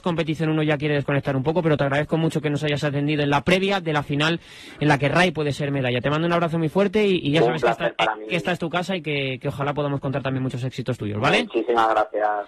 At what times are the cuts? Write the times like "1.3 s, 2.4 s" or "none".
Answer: none